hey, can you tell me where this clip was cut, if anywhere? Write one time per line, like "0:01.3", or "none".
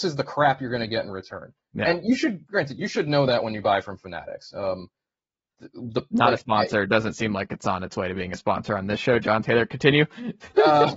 none